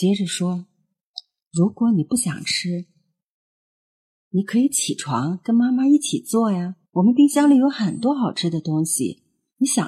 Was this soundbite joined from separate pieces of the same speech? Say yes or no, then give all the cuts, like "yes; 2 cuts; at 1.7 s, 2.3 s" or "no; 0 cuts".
yes; 1 cut; at 6.9 s